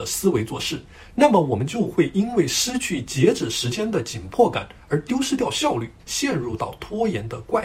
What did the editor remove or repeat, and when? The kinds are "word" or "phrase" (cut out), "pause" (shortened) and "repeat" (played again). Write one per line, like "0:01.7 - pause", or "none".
0:06.0 - pause